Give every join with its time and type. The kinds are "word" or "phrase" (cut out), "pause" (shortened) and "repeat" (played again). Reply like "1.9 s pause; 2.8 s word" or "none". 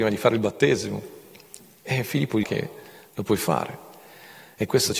2.4 s phrase